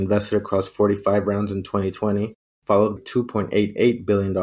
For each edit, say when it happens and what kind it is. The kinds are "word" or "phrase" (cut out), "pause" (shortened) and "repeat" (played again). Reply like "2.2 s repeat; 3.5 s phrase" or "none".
3.0 s word